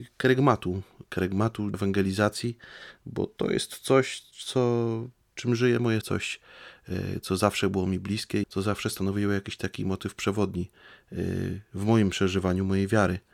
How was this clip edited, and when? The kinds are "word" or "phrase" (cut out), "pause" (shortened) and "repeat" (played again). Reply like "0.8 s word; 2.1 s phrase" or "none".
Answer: 1.7 s word; 6.0 s word; 8.4 s word